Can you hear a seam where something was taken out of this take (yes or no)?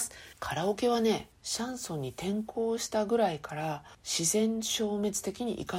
no